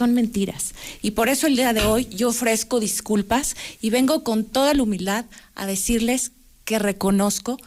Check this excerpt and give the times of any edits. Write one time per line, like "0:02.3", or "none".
none